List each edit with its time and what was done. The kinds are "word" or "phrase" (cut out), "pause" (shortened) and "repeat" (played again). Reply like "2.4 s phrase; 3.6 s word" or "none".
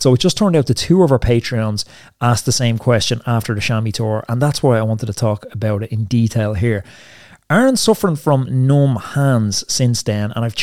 none